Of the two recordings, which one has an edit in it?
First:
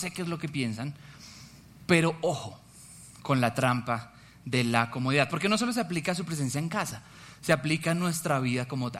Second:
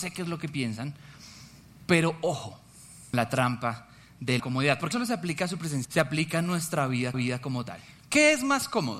second; 5 cuts; at 3.1 s, 4.4 s, 4.9 s, 5.8 s, 7.1 s

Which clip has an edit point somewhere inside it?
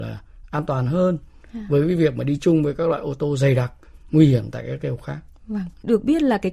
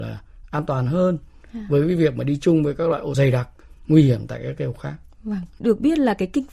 second; 1 cut; at 3.1 s

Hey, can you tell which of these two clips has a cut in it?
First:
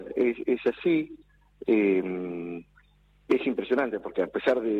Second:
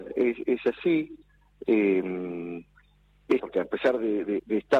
second; 1 cut; at 3.4 s

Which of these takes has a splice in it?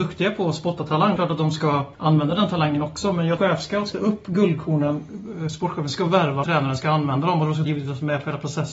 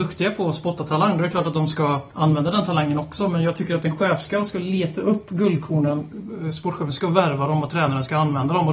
first; 5 cuts; at 1.2 s, 3.4 s, 3.9 s, 6.4 s, 7.7 s

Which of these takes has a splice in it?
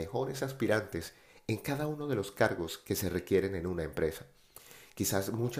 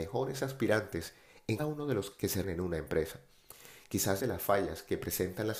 second; 4 cuts; at 1.6 s, 2.1 s, 2.4 s, 4.2 s

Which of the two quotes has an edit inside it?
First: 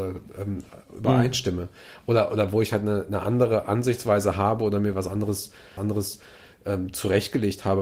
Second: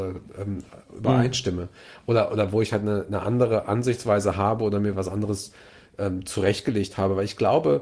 first; 1 cut; at 5.8 s

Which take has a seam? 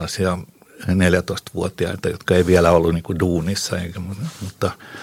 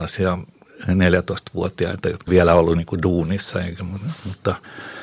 second; 1 cut; at 2.3 s

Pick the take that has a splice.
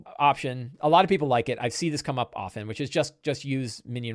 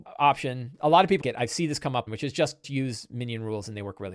second; 3 cuts; at 1.2 s, 2.1 s, 2.6 s

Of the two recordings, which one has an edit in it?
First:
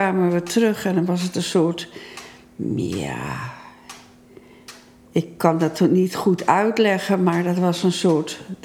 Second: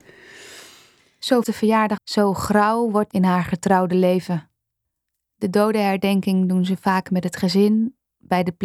second; 3 cuts; at 1.4 s, 2.0 s, 3.1 s

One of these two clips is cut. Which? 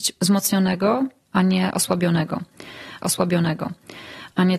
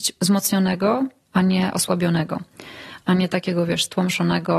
first; 1 cut; at 3.0 s

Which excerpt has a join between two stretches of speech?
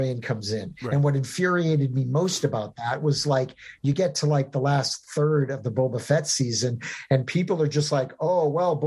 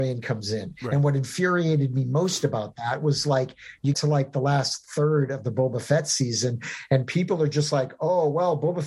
second; 1 cut; at 3.9 s

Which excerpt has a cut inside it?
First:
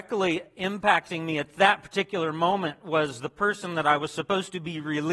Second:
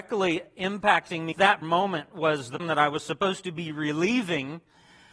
second; 3 cuts; at 1.3 s, 1.6 s, 2.6 s

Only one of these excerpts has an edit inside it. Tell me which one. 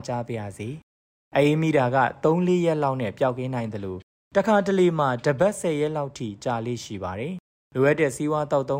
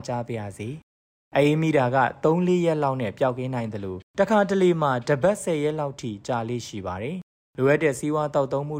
second; 1 cut; at 4.1 s

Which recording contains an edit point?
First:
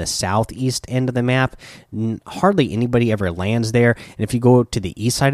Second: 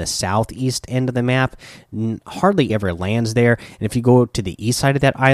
second; 1 cut; at 2.7 s

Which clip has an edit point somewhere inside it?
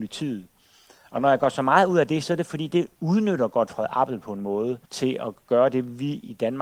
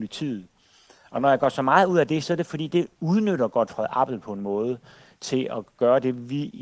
first; 1 cut; at 4.8 s

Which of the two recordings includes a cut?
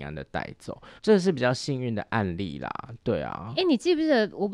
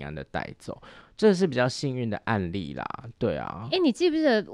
first; 1 cut; at 1.0 s

